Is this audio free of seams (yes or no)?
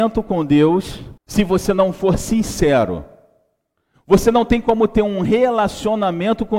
no